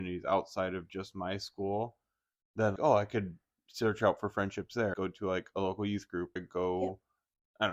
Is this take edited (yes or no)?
yes